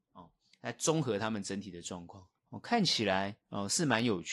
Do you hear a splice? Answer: yes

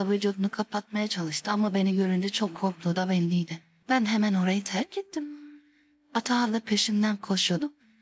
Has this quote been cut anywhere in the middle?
no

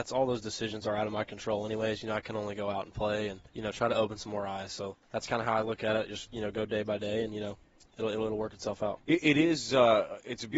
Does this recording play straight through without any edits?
no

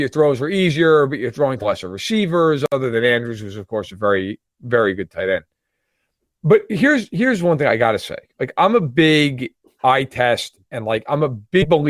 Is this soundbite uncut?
yes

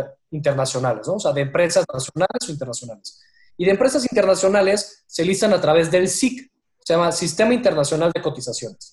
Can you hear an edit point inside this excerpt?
no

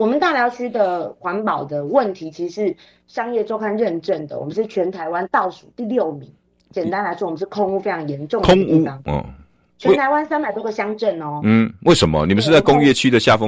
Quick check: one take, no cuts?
yes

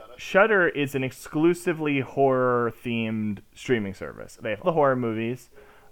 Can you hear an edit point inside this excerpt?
yes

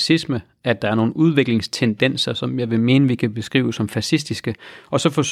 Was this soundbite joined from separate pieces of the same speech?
no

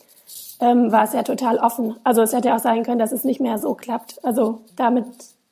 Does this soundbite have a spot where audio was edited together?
no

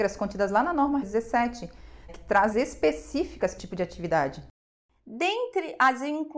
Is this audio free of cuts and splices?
no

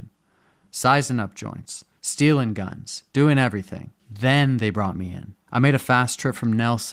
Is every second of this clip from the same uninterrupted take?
no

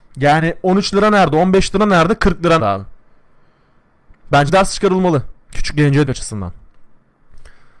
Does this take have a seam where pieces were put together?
yes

